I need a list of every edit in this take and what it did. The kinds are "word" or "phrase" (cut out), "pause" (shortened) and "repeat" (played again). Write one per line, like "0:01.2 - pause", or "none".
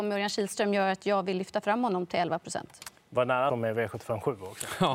0:03.0 - pause
0:03.5 - phrase